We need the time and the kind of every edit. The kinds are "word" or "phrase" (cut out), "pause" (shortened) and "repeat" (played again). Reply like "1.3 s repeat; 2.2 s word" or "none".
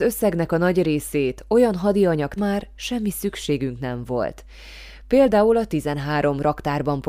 2.4 s phrase